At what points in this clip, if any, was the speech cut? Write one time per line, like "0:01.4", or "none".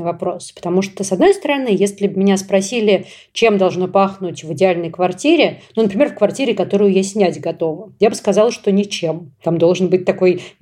none